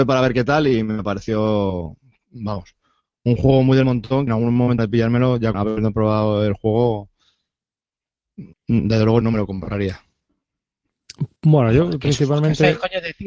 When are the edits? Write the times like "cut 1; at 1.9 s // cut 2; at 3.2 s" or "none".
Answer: cut 1; at 4.3 s // cut 2; at 4.8 s // cut 3; at 5.5 s // cut 4; at 8.5 s // cut 5; at 9.2 s // cut 6; at 11.4 s